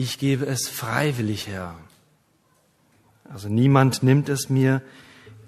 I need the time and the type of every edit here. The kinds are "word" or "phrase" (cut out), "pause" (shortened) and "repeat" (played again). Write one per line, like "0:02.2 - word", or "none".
none